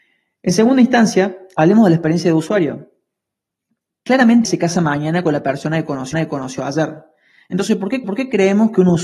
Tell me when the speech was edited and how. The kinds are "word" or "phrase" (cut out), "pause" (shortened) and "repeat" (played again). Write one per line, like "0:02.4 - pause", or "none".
0:04.4 - word
0:06.1 - repeat
0:08.0 - repeat